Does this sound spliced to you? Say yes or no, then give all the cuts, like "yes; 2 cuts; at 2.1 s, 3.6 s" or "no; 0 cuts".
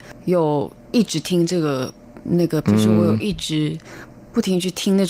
yes; 1 cut; at 2.6 s